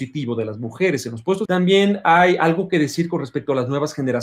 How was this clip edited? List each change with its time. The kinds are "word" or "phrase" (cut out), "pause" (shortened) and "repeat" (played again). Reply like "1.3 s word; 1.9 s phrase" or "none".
1.4 s word

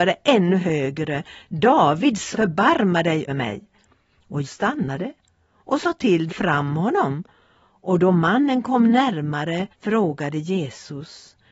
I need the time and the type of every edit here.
2.3 s word; 3.3 s word; 4.4 s word; 6.3 s phrase; 9.7 s pause

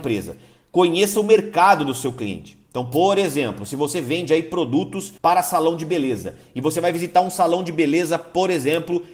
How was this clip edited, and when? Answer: 5.2 s pause

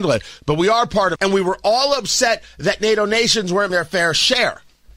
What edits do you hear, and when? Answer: 1.2 s word; 3.7 s word

